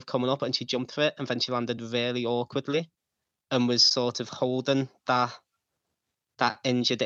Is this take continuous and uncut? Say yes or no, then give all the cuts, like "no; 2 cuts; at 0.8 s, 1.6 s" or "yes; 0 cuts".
yes; 0 cuts